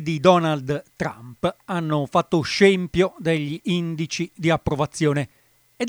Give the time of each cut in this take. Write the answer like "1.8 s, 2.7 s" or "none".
none